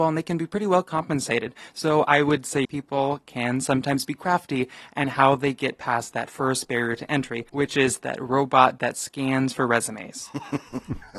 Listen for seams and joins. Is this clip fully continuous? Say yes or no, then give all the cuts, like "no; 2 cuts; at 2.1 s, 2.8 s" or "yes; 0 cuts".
no; 3 cuts; at 2.6 s, 7.5 s, 8.0 s